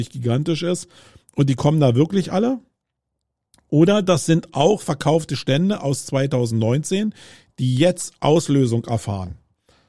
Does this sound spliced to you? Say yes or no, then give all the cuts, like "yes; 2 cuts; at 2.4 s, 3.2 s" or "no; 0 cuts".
no; 0 cuts